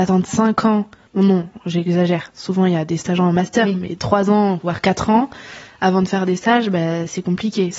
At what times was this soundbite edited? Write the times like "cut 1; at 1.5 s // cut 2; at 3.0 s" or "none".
none